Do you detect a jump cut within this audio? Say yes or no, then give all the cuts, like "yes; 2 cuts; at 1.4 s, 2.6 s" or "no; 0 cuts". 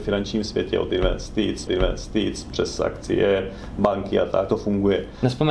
yes; 2 cuts; at 1.7 s, 4.5 s